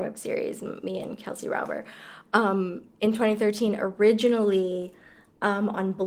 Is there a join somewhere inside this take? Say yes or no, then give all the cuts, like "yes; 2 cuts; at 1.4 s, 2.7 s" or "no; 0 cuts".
no; 0 cuts